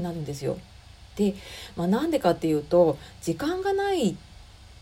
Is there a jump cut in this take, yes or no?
no